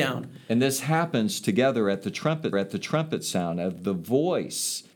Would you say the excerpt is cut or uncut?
cut